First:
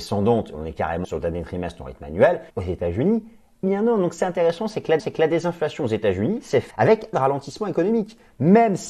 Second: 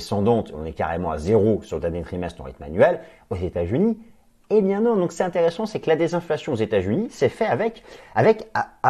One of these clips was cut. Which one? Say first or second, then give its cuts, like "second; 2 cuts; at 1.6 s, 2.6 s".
first; 6 cuts; at 1.0 s, 2.5 s, 3.6 s, 5.0 s, 6.7 s, 7.1 s